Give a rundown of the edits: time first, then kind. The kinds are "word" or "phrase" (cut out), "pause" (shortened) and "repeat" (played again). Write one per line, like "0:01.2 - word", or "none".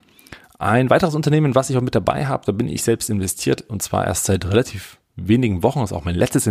none